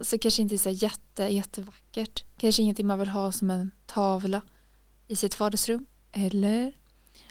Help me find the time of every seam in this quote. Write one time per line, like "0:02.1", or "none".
none